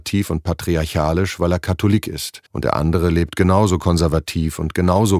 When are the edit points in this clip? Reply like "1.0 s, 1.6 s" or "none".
2.5 s